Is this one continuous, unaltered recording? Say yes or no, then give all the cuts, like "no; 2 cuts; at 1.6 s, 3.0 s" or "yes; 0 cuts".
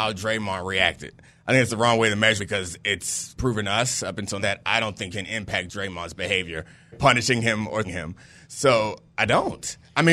no; 6 cuts; at 2.4 s, 3.4 s, 4.4 s, 5.1 s, 6.9 s, 7.8 s